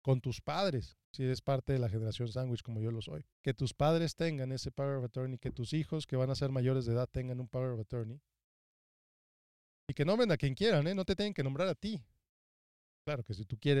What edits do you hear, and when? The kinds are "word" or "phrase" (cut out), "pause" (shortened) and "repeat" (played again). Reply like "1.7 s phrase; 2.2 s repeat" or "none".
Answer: 1.0 s pause; 3.3 s pause